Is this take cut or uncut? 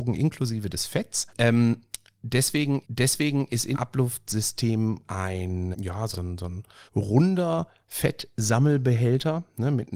cut